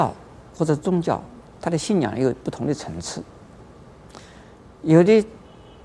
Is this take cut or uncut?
uncut